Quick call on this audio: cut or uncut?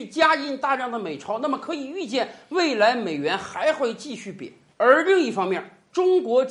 uncut